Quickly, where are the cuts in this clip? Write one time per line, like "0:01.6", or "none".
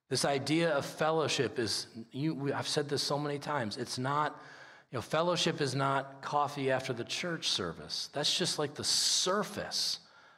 none